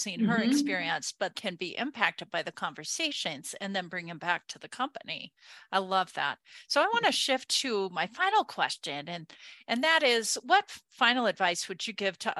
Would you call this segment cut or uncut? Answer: cut